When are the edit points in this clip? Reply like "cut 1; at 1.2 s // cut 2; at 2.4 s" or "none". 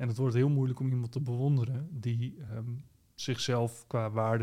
none